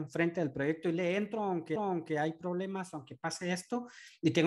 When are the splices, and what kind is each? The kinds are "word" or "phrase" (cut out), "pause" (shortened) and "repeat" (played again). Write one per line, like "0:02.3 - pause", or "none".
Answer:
0:01.8 - repeat